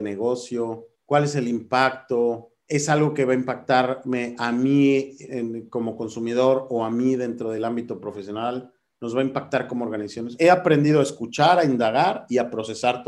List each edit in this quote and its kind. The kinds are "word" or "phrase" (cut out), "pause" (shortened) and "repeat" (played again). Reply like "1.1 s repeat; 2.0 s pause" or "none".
1.0 s pause; 2.6 s pause; 5.3 s word